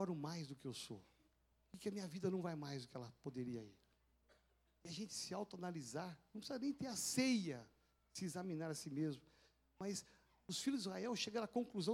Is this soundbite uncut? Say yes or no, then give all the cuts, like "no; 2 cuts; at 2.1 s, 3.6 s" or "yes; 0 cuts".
yes; 0 cuts